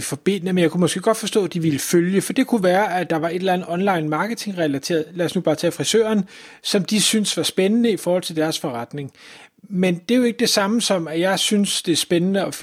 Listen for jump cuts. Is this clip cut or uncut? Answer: uncut